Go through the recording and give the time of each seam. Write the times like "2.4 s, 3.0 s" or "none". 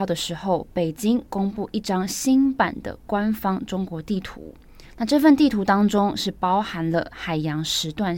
4.9 s